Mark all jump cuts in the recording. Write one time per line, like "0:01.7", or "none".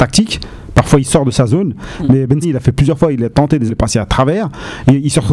0:02.4
0:03.7

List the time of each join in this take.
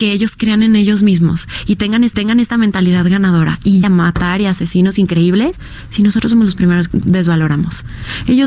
0:02.1
0:03.8
0:06.9

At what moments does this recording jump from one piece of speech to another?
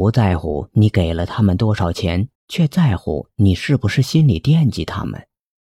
0:02.4

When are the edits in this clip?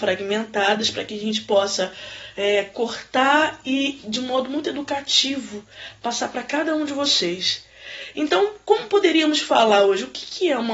none

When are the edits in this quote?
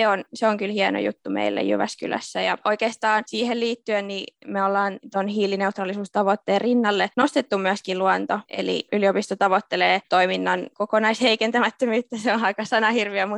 none

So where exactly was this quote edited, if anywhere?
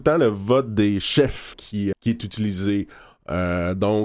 0:01.5
0:01.9

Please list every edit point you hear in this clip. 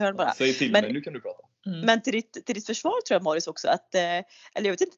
none

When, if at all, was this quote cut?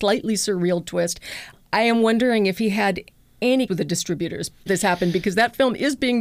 0:03.7
0:04.7

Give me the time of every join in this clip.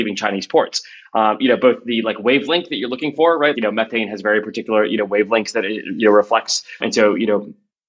0:03.5
0:06.8

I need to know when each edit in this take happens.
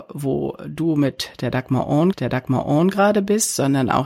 0:02.1

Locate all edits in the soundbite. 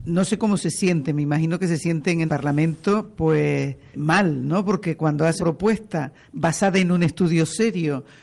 0:02.3
0:03.9
0:05.4

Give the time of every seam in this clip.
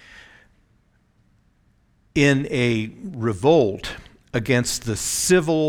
none

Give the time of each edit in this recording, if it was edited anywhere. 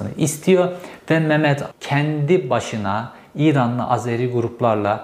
0:01.7

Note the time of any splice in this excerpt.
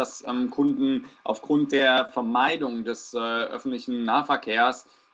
none

